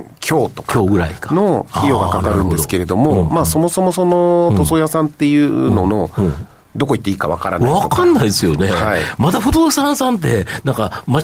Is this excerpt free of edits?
yes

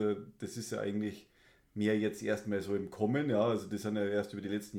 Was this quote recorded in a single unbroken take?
yes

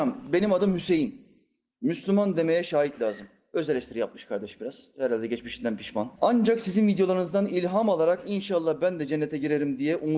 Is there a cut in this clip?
yes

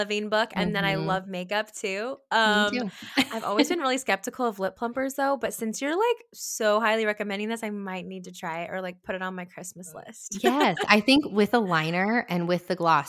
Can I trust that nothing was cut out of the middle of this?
yes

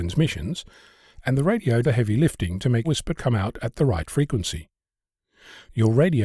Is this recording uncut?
no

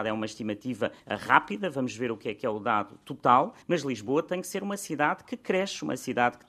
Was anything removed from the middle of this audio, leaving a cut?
yes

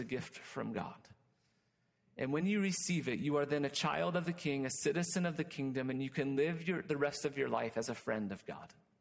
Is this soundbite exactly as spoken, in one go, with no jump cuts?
yes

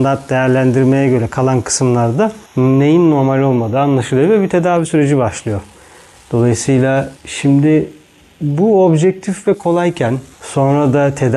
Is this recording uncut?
no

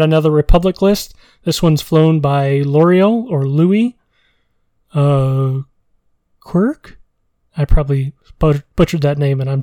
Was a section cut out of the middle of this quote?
no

